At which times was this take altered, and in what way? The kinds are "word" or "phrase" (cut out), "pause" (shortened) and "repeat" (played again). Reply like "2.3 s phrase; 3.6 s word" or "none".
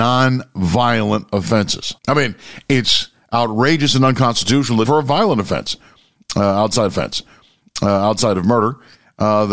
2.0 s pause; 4.8 s word; 6.9 s repeat